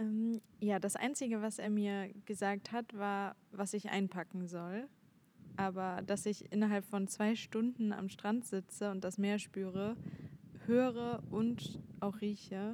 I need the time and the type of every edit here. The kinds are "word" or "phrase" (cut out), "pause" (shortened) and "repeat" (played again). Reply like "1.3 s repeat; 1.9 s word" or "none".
none